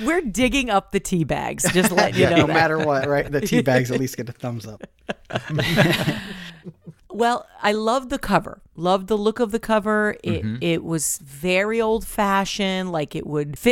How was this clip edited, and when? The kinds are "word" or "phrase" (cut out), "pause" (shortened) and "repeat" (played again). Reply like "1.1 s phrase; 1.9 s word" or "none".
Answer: none